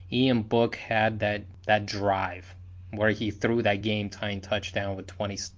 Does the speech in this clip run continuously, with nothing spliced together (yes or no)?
yes